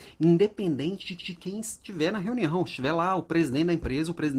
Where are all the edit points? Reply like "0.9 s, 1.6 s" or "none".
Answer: 1.2 s